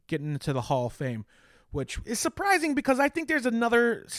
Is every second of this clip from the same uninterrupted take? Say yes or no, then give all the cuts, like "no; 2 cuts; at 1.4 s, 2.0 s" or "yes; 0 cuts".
yes; 0 cuts